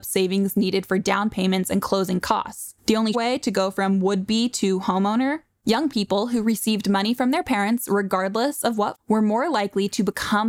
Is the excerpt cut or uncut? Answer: cut